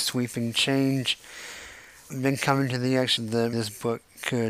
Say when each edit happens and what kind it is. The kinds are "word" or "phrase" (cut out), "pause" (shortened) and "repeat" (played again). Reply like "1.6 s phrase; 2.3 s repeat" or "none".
2.1 s word; 3.2 s word; 3.5 s word